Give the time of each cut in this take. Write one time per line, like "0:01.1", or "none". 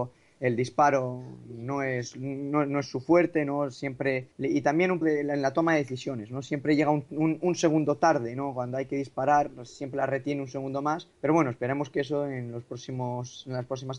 0:04.3
0:05.0
0:11.1